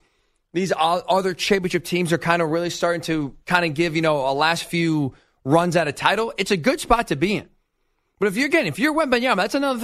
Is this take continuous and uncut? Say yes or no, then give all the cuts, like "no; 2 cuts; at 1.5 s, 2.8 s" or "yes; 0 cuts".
no; 1 cut; at 3.4 s